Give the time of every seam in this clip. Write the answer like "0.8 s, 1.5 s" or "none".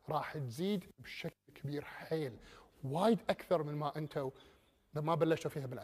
none